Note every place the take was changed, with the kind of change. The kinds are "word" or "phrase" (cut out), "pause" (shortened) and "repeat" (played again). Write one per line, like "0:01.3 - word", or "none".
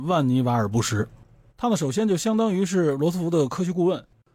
none